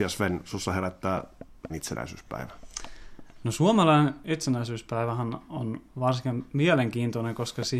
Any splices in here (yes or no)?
yes